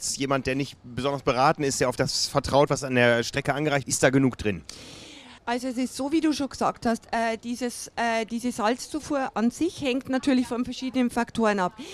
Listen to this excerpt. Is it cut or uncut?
cut